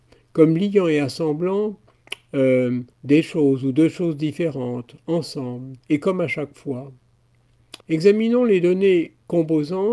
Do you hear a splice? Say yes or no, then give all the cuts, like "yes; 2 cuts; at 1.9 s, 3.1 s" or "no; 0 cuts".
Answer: yes; 3 cuts; at 2.9 s, 5.8 s, 7.8 s